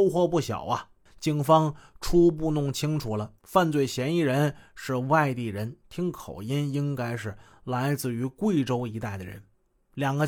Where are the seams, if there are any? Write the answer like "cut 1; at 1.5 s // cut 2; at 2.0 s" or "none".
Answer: cut 1; at 3.4 s